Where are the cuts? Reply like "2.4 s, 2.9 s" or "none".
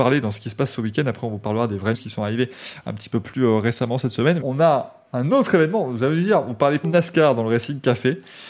1.9 s, 3.2 s, 4.4 s, 6.8 s